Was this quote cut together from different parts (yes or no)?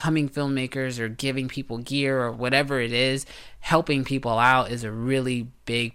no